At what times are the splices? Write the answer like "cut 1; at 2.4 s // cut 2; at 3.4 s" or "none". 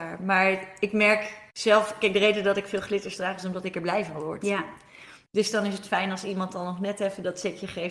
none